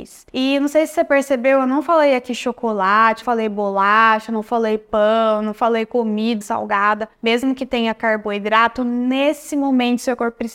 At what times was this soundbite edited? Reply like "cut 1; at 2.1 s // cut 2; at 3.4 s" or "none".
cut 1; at 3.2 s // cut 2; at 6.4 s // cut 3; at 7.1 s